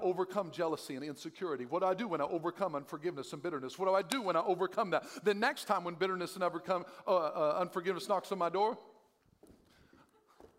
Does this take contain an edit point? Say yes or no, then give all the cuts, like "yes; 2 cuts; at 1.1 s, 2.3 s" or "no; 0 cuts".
no; 0 cuts